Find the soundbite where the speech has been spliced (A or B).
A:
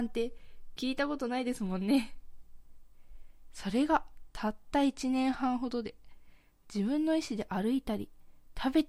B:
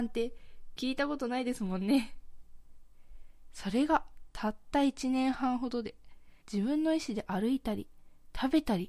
B